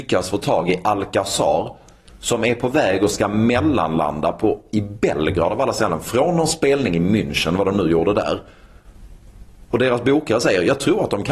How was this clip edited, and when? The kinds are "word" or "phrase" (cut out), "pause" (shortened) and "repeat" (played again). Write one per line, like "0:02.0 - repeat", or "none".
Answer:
none